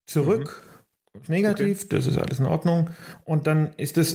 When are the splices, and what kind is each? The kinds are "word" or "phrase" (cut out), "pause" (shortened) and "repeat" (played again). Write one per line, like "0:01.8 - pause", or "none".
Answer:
none